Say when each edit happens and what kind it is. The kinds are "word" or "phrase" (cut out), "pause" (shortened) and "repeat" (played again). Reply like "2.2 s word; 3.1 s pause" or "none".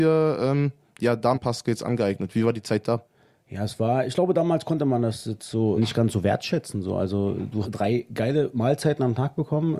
1.3 s word; 5.8 s word; 7.6 s word

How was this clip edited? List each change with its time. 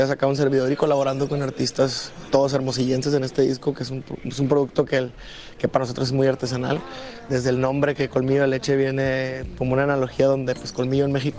2.3 s word; 7.3 s word

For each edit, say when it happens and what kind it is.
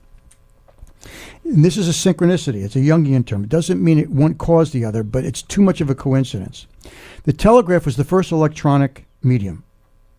1.4 s pause; 9.1 s pause

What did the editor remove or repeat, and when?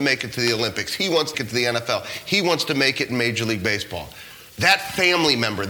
1.3 s word; 4.5 s pause

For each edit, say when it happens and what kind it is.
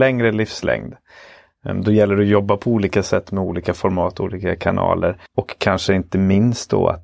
5.3 s pause

